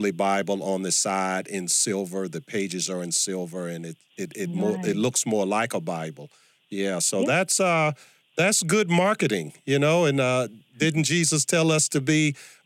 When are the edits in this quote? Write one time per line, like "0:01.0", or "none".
none